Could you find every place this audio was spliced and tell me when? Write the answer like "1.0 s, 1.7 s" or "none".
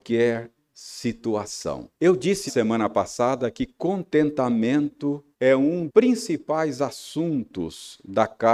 1.9 s, 2.5 s, 5.3 s, 5.9 s

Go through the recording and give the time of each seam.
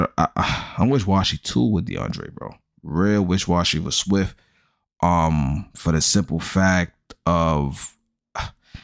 none

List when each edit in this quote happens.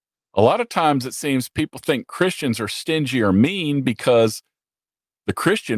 none

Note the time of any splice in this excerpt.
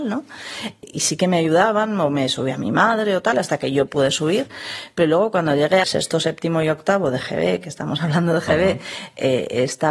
3.9 s, 5.8 s

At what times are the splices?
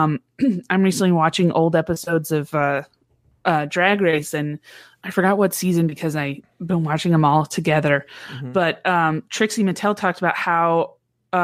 5.0 s

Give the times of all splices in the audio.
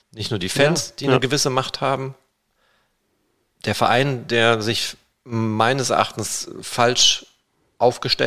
none

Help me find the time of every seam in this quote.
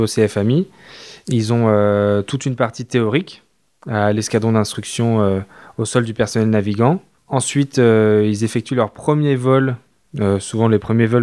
none

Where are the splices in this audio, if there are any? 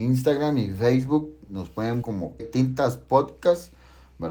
2.0 s, 2.4 s

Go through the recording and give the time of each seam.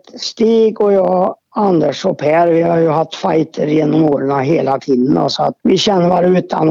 1.4 s, 5.6 s

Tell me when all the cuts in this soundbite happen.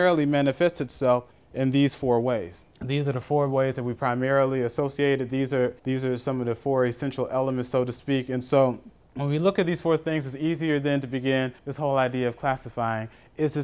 1.3 s, 2.7 s, 5.8 s, 9.0 s, 11.6 s

